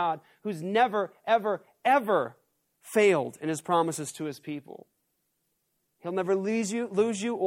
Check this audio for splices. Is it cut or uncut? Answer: uncut